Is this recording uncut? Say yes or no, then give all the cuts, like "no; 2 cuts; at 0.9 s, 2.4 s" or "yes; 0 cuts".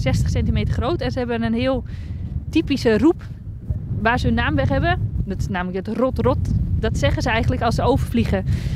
yes; 0 cuts